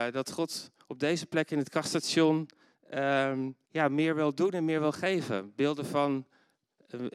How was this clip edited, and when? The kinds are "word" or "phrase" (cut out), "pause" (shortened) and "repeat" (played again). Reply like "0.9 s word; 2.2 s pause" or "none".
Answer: 3.6 s pause